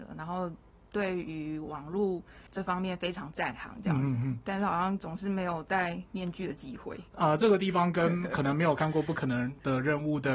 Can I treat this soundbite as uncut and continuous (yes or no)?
no